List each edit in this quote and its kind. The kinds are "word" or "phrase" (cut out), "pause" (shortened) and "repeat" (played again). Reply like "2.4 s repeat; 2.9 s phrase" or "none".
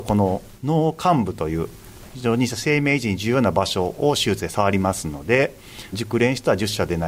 5.9 s phrase